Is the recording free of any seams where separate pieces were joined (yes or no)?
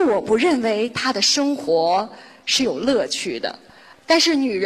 yes